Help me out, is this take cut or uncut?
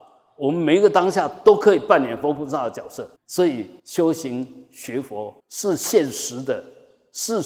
cut